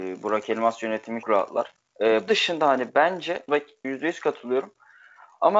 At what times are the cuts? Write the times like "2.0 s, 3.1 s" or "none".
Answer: 1.2 s, 2.3 s, 3.5 s, 3.8 s